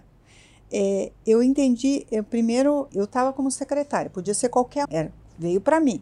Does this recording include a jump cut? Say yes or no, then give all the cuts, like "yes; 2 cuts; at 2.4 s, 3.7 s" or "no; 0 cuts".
yes; 2 cuts; at 2.9 s, 4.8 s